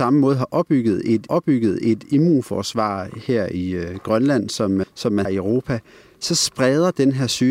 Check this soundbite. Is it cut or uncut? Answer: cut